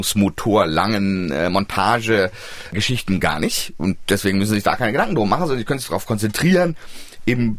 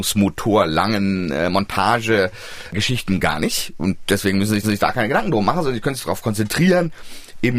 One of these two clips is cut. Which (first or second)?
second